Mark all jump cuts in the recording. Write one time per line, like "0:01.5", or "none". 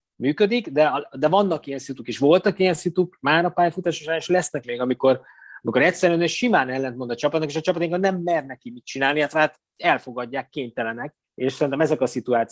0:04.6
0:11.2